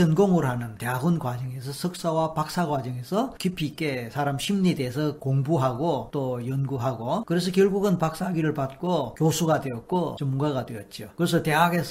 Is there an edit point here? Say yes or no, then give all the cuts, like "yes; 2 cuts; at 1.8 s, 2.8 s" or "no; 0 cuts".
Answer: no; 0 cuts